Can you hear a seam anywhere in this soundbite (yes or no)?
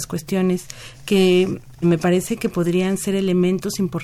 yes